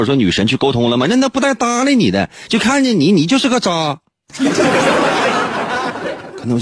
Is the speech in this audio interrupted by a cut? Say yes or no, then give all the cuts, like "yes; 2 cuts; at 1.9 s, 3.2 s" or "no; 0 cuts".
no; 0 cuts